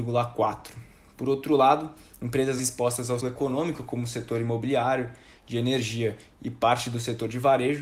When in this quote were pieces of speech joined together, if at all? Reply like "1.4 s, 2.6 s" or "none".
2.6 s, 3.2 s